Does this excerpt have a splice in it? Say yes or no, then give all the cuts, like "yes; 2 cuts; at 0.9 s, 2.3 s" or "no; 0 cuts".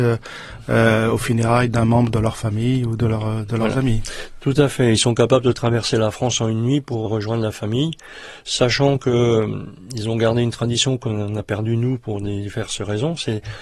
yes; 1 cut; at 7.1 s